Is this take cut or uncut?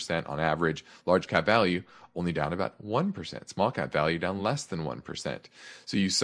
uncut